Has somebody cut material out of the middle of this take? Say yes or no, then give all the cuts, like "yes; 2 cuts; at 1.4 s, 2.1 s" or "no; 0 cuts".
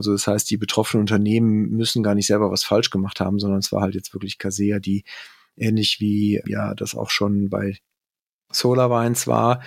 no; 0 cuts